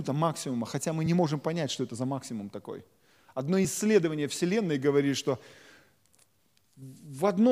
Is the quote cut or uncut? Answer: uncut